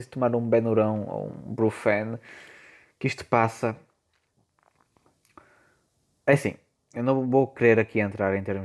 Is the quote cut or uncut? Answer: uncut